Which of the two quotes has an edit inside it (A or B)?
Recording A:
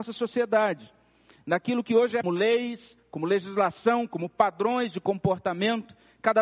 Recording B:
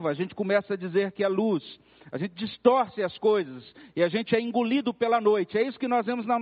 A